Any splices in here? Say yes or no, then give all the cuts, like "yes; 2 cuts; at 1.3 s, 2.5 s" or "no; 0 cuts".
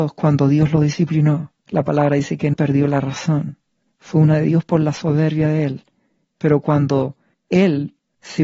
yes; 3 cuts; at 1.6 s, 2.5 s, 4.3 s